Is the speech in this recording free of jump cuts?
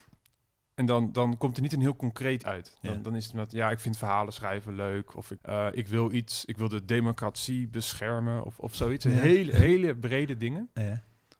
no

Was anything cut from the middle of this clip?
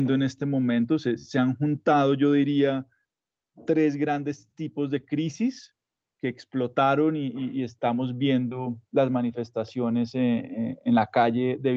no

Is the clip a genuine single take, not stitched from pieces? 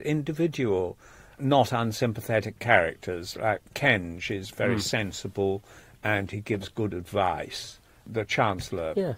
yes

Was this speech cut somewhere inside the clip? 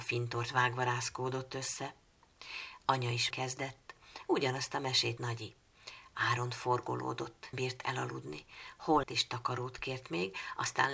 yes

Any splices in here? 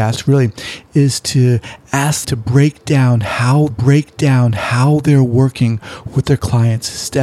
yes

